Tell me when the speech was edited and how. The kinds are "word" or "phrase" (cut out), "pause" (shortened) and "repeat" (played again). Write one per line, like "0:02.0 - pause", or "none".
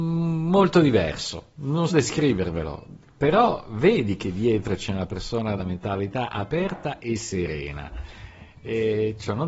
0:01.9 - word
0:05.6 - word